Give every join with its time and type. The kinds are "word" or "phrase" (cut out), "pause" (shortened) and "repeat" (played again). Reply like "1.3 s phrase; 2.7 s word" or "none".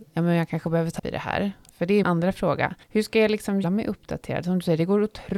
1.0 s word; 2.0 s word; 2.8 s pause; 3.6 s phrase